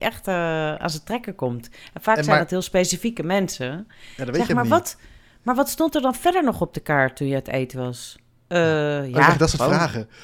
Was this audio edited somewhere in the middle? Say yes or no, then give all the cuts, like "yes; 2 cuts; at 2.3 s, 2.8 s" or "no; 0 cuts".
no; 0 cuts